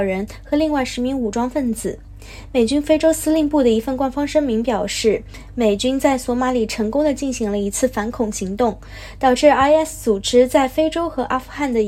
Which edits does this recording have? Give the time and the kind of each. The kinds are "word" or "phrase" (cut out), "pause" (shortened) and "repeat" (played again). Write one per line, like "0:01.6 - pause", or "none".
none